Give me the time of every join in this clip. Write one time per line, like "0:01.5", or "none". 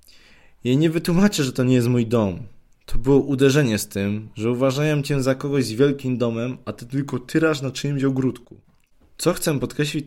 none